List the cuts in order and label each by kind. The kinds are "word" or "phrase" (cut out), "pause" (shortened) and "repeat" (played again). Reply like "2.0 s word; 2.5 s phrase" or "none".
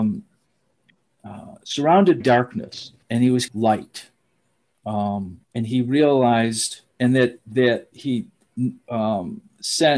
2.2 s word; 3.0 s pause; 3.5 s phrase; 5.4 s pause; 6.9 s pause; 7.9 s word